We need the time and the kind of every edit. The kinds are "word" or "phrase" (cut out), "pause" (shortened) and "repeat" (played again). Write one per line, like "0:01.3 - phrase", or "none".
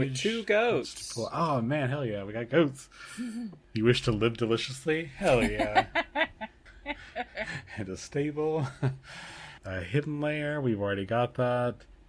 none